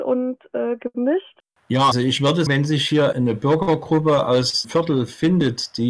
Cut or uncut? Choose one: cut